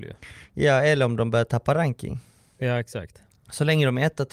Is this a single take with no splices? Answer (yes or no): yes